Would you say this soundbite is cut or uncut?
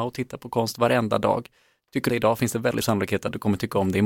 cut